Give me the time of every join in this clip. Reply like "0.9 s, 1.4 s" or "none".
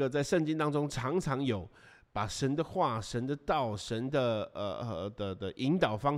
none